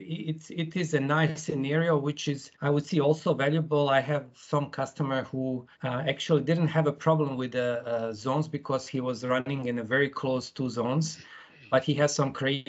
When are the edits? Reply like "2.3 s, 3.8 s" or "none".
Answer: 2.5 s, 5.7 s

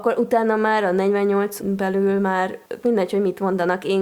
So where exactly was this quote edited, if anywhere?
1.6 s, 2.8 s

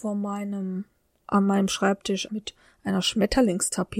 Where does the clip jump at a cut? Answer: 2.3 s

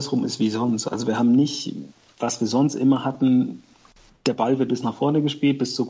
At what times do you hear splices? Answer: 4.7 s

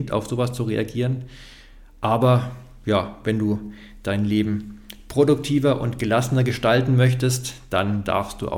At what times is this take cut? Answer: none

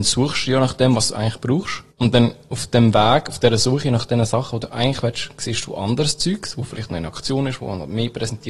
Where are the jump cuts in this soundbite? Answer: 1.9 s

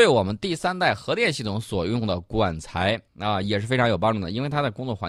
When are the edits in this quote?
3.1 s

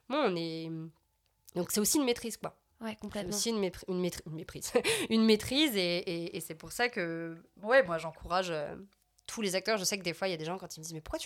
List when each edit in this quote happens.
9.0 s

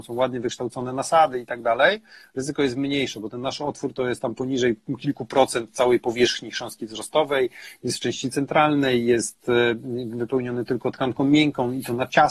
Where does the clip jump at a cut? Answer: none

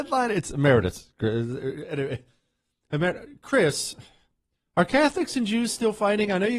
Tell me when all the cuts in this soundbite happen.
none

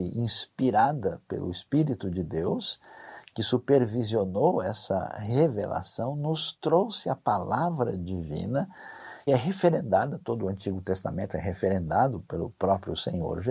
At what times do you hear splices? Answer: 9.3 s

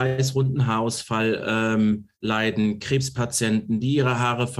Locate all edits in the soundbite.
2.1 s

